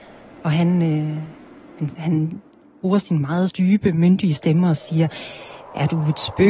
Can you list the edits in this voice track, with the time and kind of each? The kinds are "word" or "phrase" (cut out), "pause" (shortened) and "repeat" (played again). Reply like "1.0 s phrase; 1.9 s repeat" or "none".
2.0 s word; 3.5 s word

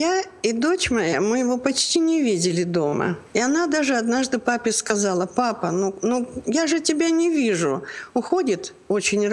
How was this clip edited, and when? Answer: 3.3 s pause

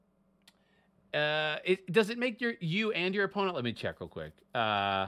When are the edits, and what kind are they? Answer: none

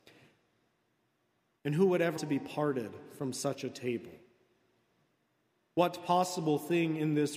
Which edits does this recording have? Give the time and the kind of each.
2.2 s word

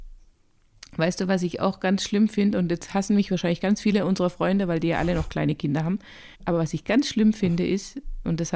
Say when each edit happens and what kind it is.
6.3 s pause

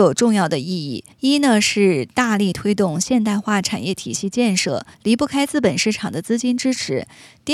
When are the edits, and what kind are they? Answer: 1.1 s pause; 4.9 s pause

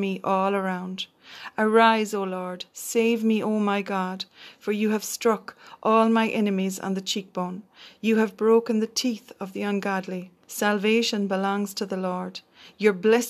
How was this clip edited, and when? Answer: 10.4 s pause

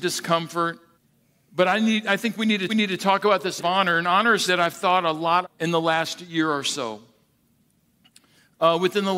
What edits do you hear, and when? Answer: 0.9 s pause; 2.7 s repeat; 3.6 s word; 4.5 s word; 5.4 s word

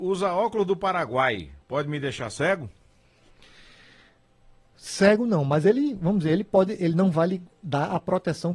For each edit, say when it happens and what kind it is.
1.6 s pause

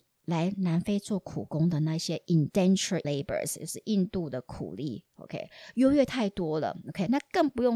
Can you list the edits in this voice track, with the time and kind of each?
3.0 s word

